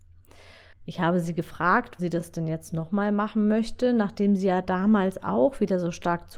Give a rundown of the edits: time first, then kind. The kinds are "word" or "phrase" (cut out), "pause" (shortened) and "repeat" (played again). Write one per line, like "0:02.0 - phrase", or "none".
0:02.0 - word